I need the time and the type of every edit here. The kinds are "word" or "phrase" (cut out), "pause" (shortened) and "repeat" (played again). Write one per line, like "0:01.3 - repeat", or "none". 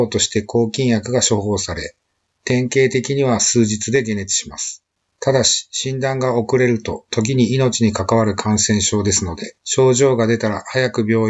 0:05.0 - pause
0:09.6 - pause